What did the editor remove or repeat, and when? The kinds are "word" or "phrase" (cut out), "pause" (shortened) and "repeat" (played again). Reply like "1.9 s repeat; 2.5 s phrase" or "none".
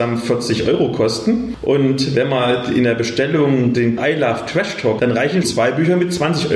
4.0 s word; 5.0 s word; 5.4 s word